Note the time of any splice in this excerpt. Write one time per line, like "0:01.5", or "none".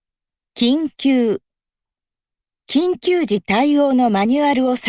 none